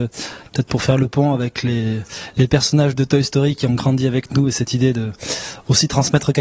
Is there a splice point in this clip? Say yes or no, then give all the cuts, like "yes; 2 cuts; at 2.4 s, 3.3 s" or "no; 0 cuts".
yes; 1 cut; at 3.0 s